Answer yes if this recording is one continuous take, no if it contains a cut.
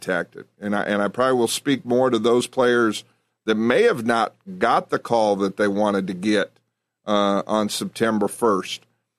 yes